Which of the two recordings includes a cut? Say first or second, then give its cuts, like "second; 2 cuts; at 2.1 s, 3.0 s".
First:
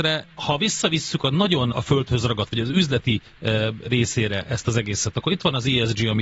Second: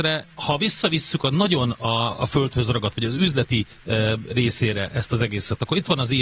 first; 1 cut; at 1.7 s